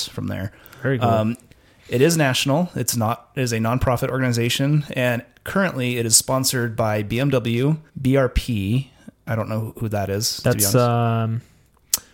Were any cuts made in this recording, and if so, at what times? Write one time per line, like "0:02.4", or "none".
0:07.9